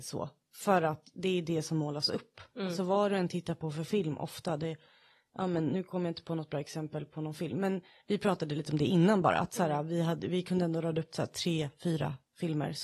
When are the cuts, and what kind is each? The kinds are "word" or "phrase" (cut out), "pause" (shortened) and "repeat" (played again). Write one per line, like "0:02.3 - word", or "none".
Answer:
none